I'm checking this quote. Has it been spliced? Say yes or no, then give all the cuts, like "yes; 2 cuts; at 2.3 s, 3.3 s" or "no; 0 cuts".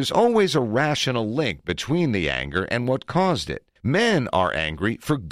yes; 1 cut; at 3.8 s